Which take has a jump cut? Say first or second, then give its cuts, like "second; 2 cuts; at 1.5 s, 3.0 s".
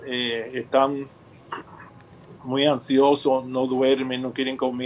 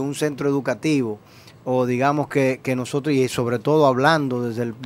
first; 1 cut; at 2.4 s